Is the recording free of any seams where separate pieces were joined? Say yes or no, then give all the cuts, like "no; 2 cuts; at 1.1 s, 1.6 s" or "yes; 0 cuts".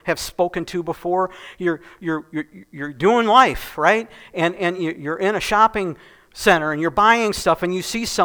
yes; 0 cuts